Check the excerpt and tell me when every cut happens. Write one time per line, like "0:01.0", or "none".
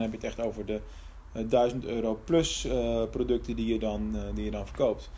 none